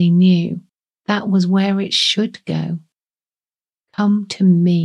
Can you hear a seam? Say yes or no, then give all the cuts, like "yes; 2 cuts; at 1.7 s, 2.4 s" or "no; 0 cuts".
no; 0 cuts